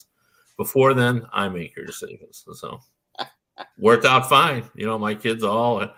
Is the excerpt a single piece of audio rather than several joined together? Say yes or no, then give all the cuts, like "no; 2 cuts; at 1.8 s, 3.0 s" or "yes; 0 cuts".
no; 1 cut; at 3.7 s